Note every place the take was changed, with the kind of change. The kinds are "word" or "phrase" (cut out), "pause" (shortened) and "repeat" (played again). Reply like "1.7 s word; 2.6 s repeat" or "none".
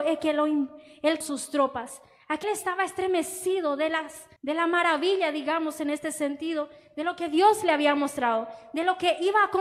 1.2 s phrase; 2.4 s phrase; 4.4 s pause